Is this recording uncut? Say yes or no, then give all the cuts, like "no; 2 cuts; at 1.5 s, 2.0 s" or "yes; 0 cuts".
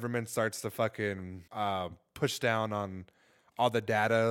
no; 1 cut; at 1.5 s